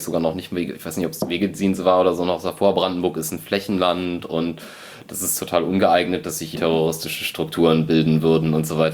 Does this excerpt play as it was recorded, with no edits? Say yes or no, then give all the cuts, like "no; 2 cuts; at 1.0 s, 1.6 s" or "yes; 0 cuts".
no; 1 cut; at 6.5 s